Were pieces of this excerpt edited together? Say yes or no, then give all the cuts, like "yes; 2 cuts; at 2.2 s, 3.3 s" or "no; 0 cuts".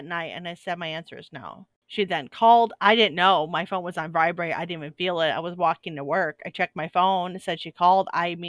no; 0 cuts